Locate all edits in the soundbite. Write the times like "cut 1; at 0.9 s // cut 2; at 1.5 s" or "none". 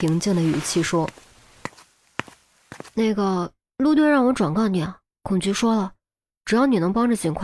none